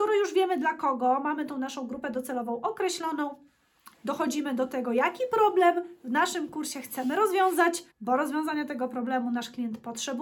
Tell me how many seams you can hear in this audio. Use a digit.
2